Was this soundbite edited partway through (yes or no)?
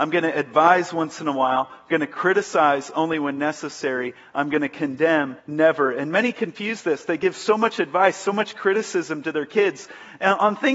yes